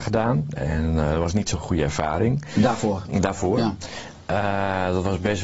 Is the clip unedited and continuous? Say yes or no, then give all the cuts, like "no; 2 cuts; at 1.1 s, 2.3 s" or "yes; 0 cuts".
yes; 0 cuts